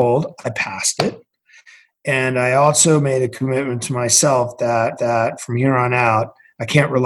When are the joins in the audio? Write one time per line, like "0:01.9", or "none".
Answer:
0:05.0